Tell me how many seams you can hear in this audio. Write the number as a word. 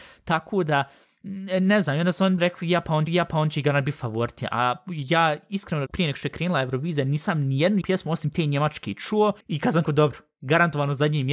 six